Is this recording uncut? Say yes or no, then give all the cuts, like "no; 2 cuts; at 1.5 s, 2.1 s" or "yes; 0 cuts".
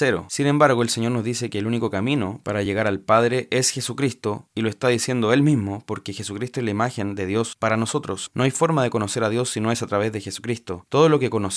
yes; 0 cuts